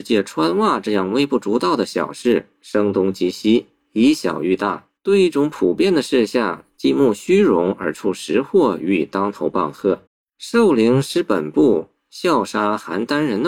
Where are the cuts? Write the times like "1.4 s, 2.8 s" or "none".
5.0 s, 10.1 s